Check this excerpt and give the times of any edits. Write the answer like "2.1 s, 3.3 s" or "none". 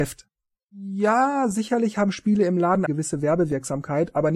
2.9 s